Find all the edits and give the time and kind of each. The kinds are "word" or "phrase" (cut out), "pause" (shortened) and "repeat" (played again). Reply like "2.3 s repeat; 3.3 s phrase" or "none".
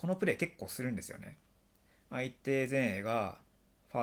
none